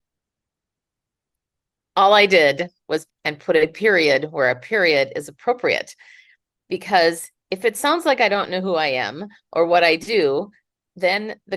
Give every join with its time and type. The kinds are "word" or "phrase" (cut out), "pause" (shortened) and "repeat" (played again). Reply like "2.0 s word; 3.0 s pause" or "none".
3.1 s word